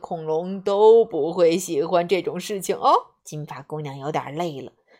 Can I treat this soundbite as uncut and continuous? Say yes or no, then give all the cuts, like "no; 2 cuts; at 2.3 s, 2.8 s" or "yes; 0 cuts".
no; 1 cut; at 3.2 s